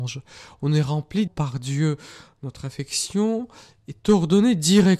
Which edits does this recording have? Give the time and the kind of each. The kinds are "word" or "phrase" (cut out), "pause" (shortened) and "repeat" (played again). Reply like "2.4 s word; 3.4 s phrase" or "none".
1.3 s word